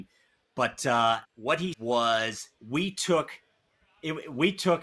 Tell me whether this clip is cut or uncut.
cut